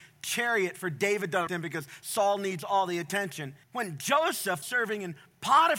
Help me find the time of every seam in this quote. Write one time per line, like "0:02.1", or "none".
0:01.5
0:03.6
0:04.6